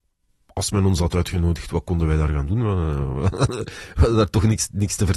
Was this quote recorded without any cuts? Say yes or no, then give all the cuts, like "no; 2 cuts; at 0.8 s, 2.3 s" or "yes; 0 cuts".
yes; 0 cuts